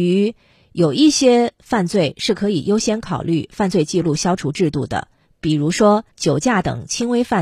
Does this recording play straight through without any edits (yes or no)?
no